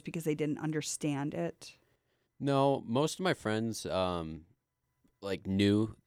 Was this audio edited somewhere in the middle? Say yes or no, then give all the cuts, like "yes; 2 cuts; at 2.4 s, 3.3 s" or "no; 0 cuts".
no; 0 cuts